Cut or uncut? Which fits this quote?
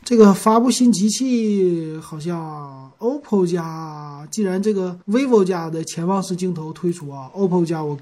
cut